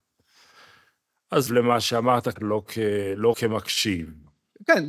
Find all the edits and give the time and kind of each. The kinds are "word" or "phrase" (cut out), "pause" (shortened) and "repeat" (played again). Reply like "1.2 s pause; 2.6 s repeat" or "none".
1.5 s phrase; 2.4 s word; 3.3 s word